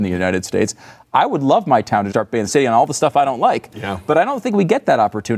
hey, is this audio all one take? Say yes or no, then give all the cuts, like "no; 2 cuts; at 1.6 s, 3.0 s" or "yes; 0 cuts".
no; 2 cuts; at 2.1 s, 2.5 s